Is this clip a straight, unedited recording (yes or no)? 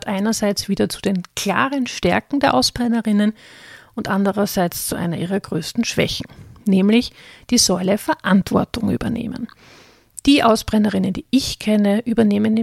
yes